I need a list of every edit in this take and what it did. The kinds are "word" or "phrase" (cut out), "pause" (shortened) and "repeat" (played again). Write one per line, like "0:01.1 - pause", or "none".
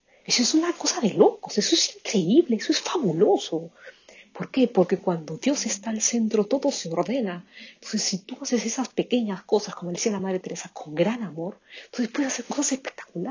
none